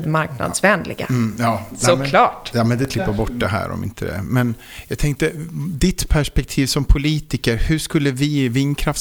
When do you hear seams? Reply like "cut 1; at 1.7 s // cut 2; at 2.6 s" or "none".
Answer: none